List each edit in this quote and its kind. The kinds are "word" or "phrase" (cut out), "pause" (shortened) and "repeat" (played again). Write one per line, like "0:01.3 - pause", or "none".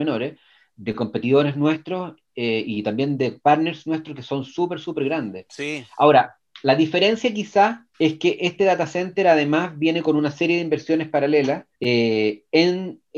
0:07.9 - pause
0:11.7 - pause